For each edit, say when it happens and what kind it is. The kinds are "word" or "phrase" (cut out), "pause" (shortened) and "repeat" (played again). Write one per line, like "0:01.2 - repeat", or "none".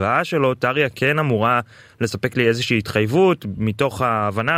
none

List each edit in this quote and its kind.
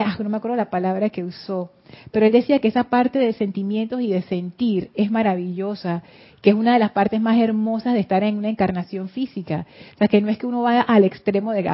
none

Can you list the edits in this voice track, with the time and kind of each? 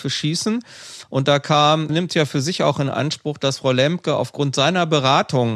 0:01.9 - word

